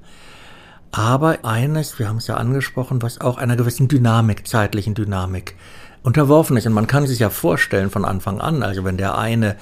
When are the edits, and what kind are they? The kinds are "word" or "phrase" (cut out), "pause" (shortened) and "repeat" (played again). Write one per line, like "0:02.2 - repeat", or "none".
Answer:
0:01.4 - word